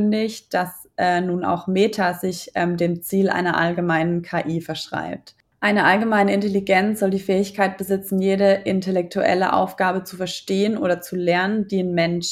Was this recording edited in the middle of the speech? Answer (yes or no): no